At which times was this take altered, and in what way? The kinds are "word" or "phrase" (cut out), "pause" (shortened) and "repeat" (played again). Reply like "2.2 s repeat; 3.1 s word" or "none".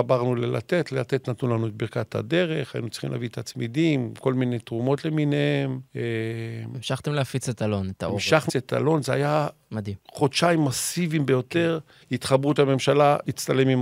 5.9 s pause; 8.5 s word; 10.0 s pause; 12.0 s pause; 12.6 s word